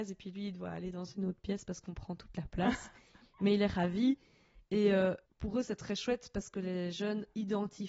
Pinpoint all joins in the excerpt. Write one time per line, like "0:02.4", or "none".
0:05.3